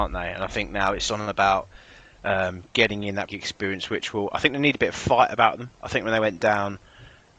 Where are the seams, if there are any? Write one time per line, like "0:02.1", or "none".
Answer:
0:01.1
0:03.3